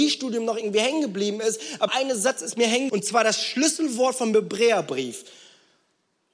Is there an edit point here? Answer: yes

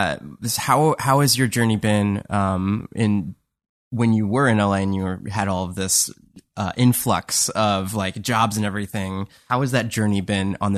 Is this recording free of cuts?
yes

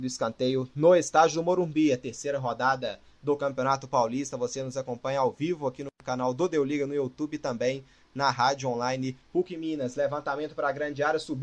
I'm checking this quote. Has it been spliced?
no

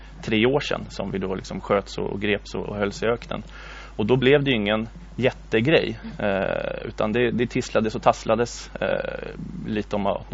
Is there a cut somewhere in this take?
no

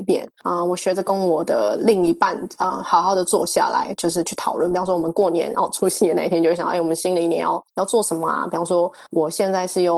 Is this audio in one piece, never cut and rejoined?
no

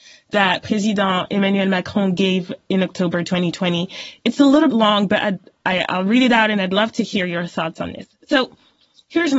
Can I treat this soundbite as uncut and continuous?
no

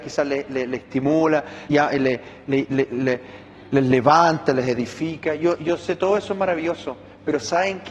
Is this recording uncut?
no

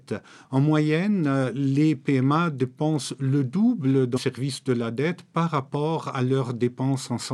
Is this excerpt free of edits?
no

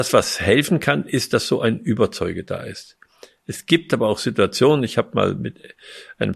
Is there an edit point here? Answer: no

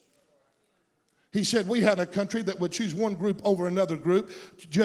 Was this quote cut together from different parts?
yes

